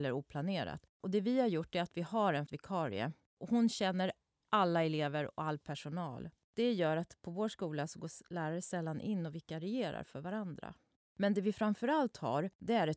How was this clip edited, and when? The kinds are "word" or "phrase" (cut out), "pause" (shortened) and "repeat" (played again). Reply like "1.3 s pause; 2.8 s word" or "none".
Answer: 2.5 s word